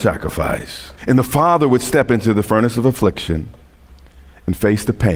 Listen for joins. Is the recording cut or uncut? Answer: cut